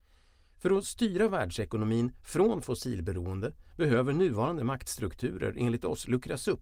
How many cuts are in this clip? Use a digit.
0